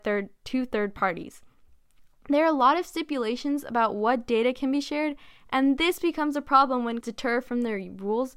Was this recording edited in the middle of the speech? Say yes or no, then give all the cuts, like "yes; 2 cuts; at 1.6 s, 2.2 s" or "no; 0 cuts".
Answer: yes; 1 cut; at 7.0 s